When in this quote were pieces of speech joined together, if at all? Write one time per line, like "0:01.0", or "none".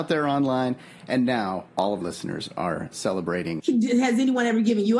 0:01.7
0:02.0